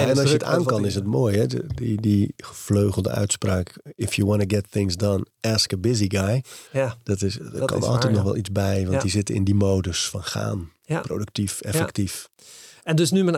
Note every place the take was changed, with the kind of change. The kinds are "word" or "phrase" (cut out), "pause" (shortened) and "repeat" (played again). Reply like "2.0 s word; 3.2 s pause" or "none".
6.7 s pause